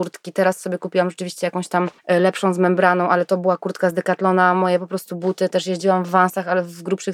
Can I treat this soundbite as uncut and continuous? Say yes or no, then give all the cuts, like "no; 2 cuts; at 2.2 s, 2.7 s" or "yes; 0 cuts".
no; 1 cut; at 2.0 s